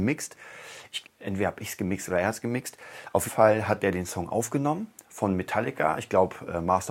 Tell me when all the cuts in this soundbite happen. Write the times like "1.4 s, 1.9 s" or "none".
1.0 s, 3.3 s